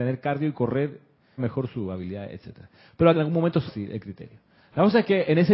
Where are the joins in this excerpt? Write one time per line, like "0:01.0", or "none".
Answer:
0:01.4
0:03.1
0:03.7